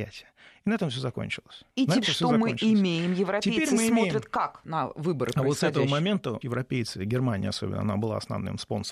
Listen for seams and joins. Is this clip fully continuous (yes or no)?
no